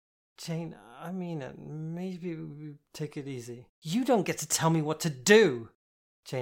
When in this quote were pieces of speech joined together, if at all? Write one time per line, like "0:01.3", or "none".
0:03.7